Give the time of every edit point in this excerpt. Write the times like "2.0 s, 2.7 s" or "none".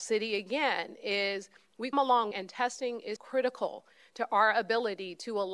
1.9 s, 2.3 s, 3.2 s